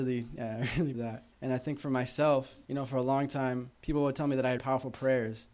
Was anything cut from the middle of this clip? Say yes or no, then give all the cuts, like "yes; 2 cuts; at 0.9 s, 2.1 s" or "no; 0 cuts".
yes; 5 cuts; at 0.9 s, 1.3 s, 2.6 s, 3.8 s, 4.6 s